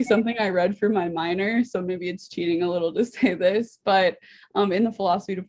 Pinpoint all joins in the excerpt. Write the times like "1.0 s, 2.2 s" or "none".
none